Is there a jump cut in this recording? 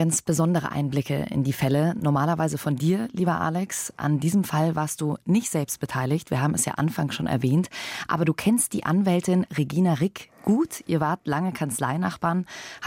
no; 0 cuts

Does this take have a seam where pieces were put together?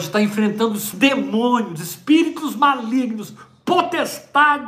yes; 1 cut; at 0.9 s

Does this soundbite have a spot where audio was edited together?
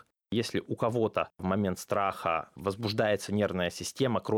no; 0 cuts

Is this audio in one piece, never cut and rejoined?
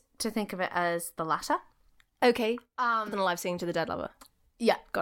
no; 1 cut; at 3.1 s

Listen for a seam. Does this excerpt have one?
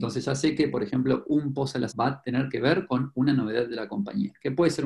yes; 1 cut; at 1.9 s

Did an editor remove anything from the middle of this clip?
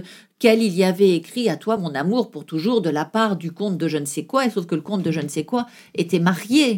no; 0 cuts

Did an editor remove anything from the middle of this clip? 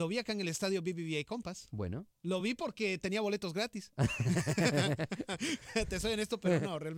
no; 0 cuts

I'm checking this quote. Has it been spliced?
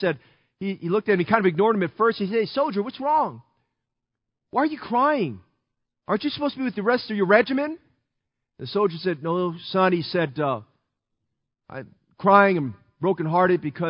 no; 0 cuts

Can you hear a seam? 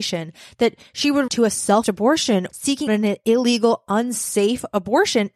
yes; 4 cuts; at 1.3 s, 1.8 s, 2.5 s, 2.9 s

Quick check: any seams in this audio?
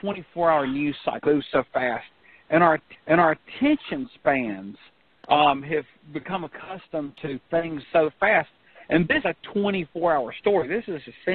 yes; 4 cuts; at 1.3 s, 2.9 s, 7.8 s, 9.2 s

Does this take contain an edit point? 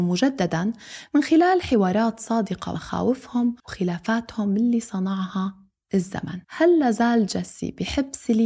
yes; 3 cuts; at 2.7 s, 3.6 s, 6.4 s

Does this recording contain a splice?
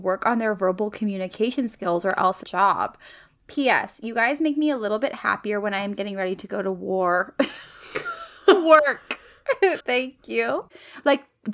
yes; 2 cuts; at 2.4 s, 9.8 s

